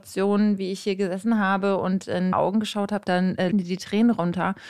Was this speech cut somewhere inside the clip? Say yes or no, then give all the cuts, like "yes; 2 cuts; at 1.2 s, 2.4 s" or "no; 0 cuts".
yes; 3 cuts; at 2.3 s, 3.1 s, 3.5 s